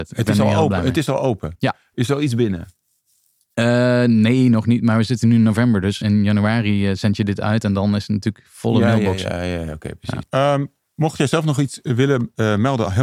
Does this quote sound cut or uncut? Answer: cut